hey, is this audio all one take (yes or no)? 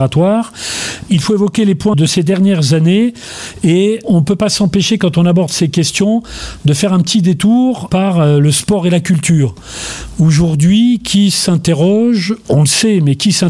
no